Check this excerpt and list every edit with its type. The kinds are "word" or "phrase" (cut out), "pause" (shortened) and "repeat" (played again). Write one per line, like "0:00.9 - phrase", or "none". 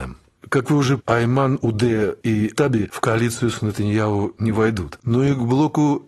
0:01.0 - word
0:02.6 - word